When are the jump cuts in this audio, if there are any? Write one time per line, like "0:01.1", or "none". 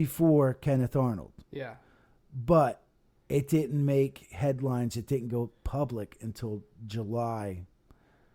none

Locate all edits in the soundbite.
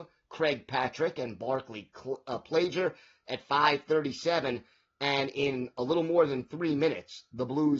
none

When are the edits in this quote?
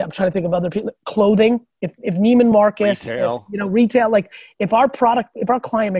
none

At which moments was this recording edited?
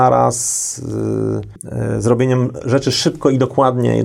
none

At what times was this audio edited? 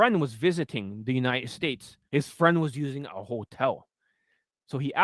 0:02.1

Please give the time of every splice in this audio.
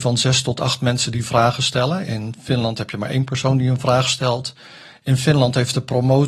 none

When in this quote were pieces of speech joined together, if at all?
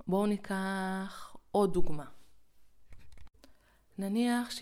none

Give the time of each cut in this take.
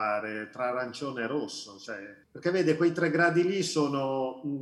0:02.2

